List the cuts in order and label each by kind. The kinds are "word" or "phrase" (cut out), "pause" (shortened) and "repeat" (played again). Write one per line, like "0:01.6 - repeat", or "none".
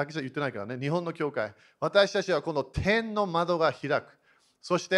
none